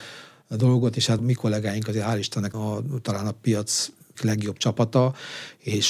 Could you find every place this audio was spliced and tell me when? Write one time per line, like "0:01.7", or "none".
0:01.2
0:02.5
0:04.1